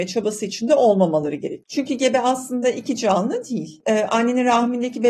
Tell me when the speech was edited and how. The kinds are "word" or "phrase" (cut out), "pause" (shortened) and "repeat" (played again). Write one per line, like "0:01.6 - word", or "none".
none